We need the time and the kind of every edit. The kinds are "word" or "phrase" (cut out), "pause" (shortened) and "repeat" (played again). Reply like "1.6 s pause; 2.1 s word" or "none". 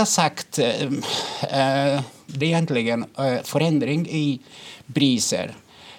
2.4 s word